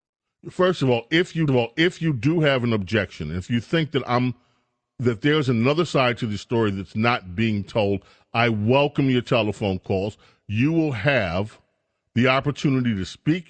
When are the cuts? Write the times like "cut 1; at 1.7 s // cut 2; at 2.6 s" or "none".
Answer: cut 1; at 1.5 s